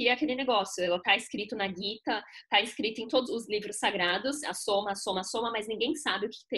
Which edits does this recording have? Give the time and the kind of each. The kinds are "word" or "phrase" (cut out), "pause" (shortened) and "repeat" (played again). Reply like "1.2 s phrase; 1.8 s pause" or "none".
3.3 s word